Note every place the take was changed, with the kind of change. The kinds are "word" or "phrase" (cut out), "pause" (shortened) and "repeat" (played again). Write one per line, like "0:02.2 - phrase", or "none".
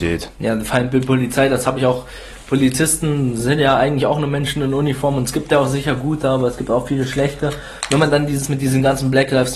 none